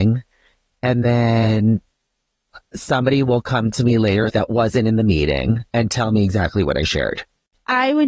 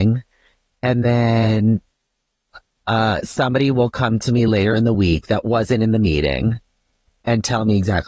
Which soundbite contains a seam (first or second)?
first